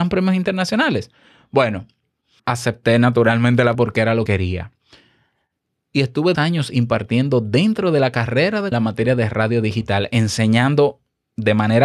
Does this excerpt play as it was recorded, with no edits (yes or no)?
no